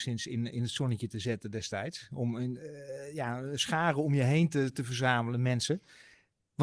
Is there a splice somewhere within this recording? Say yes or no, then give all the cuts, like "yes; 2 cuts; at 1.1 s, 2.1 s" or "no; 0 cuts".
no; 0 cuts